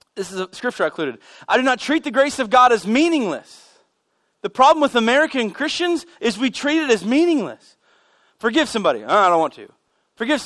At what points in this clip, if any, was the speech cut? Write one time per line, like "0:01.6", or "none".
none